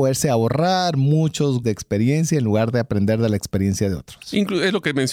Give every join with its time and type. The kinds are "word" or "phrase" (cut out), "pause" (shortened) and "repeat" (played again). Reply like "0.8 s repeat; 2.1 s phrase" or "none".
1.6 s word